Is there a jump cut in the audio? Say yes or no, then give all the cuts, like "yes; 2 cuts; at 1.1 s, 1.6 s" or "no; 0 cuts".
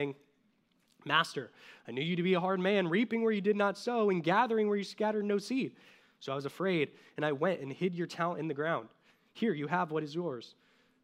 no; 0 cuts